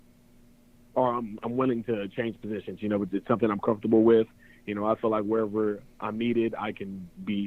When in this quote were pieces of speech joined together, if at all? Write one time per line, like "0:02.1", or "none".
none